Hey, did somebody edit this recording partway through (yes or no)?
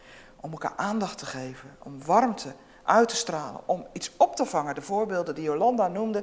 no